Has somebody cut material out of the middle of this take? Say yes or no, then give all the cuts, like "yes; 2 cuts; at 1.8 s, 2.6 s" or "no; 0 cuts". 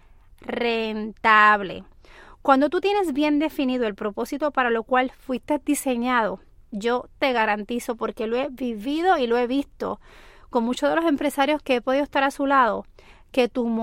no; 0 cuts